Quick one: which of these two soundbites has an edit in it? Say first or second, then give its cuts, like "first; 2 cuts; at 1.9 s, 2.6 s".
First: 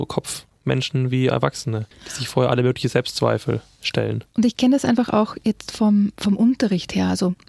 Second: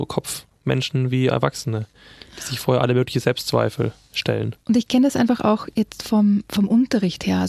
first; 1 cut; at 1.9 s